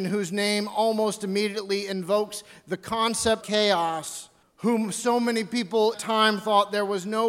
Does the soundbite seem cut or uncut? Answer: cut